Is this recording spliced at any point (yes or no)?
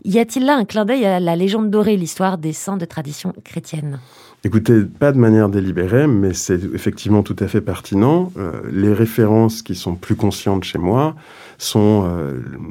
no